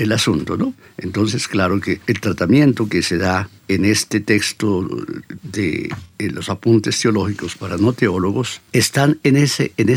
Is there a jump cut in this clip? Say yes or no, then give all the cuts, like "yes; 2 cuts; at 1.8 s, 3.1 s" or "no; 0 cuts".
yes; 3 cuts; at 2.0 s, 3.6 s, 8.7 s